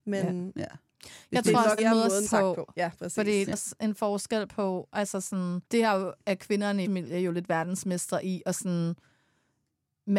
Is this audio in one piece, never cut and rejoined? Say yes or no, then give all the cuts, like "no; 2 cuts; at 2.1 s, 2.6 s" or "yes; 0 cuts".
no; 6 cuts; at 0.9 s, 1.8 s, 2.3 s, 3.5 s, 5.6 s, 6.8 s